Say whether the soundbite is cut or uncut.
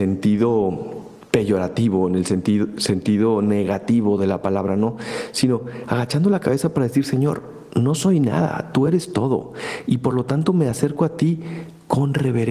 uncut